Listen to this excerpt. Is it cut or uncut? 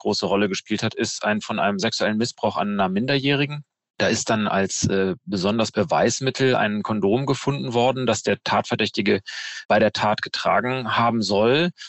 cut